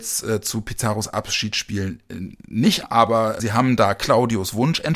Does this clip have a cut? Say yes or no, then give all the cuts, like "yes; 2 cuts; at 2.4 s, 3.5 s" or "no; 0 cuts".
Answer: yes; 2 cuts; at 2.8 s, 3.4 s